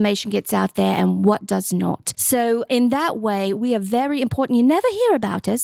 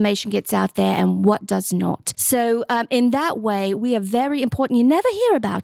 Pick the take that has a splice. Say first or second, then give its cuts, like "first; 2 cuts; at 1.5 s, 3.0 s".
first; 1 cut; at 2.7 s